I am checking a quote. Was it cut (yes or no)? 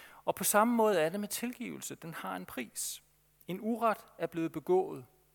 no